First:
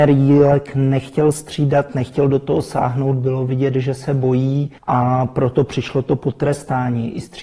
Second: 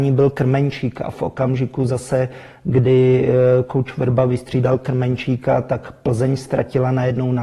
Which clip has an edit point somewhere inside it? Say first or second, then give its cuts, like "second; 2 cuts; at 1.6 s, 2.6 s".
first; 1 cut; at 4.8 s